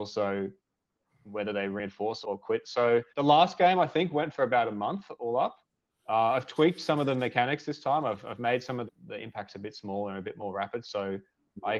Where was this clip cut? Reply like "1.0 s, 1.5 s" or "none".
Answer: 2.2 s, 3.1 s, 8.9 s